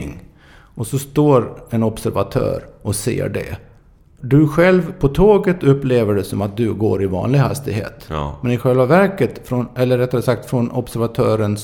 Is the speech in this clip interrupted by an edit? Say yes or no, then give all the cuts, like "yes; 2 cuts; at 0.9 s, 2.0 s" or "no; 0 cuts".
no; 0 cuts